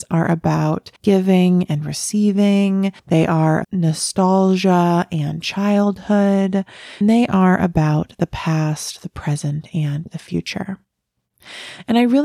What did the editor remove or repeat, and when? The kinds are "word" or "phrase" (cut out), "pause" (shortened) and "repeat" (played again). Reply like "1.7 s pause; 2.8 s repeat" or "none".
1.0 s pause; 3.0 s pause; 3.6 s word; 7.0 s word